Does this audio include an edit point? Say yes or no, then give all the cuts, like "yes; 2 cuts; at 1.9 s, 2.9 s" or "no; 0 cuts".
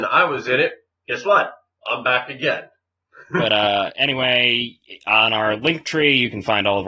no; 0 cuts